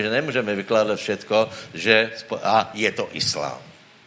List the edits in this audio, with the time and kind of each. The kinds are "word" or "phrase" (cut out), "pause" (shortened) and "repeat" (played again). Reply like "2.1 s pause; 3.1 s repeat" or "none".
none